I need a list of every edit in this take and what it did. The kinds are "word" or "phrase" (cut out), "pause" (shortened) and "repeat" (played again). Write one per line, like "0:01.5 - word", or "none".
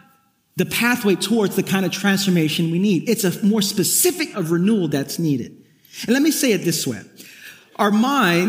0:04.3 - word